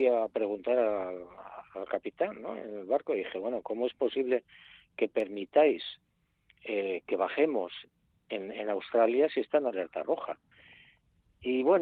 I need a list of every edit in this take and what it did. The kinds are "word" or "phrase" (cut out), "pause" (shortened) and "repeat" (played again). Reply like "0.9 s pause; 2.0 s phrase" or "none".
none